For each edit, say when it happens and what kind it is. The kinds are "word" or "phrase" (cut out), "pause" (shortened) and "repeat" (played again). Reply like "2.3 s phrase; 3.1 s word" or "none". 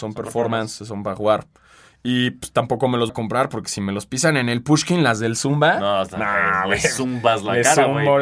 3.1 s word